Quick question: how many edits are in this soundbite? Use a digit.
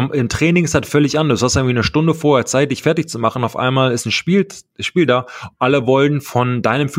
0